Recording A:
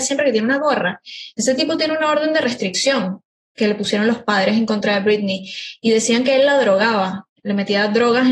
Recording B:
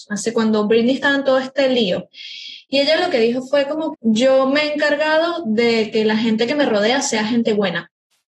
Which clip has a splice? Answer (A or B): B